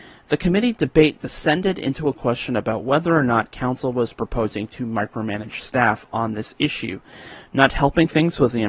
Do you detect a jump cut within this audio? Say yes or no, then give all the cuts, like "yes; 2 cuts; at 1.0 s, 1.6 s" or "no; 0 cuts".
no; 0 cuts